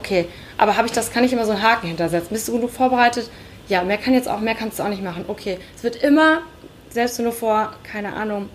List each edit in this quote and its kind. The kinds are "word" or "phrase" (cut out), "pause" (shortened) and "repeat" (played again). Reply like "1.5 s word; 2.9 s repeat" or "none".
none